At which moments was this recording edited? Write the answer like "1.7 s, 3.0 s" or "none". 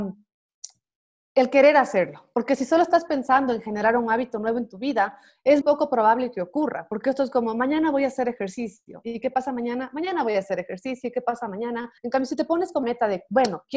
5.6 s, 12.0 s, 12.8 s